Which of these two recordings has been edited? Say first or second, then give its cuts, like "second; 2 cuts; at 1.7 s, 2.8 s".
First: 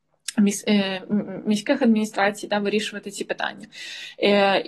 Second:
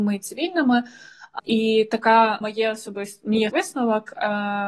second; 3 cuts; at 1.4 s, 2.4 s, 3.5 s